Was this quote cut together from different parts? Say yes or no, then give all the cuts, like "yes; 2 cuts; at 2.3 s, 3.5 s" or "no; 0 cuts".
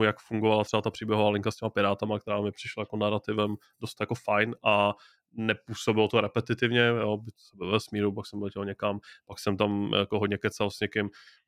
no; 0 cuts